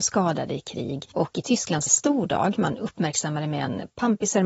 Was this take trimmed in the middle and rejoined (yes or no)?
yes